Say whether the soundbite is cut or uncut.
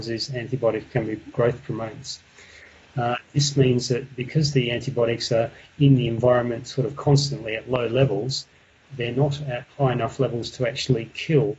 uncut